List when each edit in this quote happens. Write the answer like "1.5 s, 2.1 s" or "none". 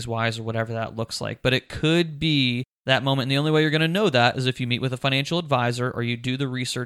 none